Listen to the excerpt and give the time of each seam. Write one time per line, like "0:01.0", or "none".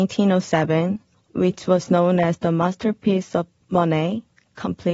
none